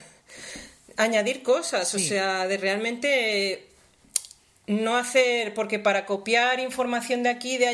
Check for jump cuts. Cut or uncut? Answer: uncut